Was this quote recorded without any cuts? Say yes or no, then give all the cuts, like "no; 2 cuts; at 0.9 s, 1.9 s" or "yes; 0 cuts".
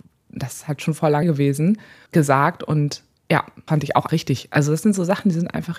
no; 4 cuts; at 1.2 s, 2.1 s, 3.7 s, 4.1 s